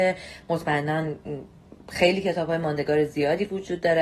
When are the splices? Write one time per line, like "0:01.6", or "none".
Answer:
0:01.8